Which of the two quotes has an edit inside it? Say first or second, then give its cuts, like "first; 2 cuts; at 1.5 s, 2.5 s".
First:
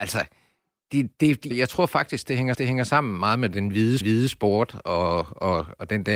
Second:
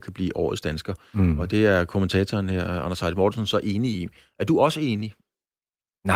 first; 3 cuts; at 1.5 s, 2.5 s, 4.0 s